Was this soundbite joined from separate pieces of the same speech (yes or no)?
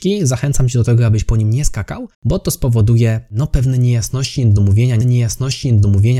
yes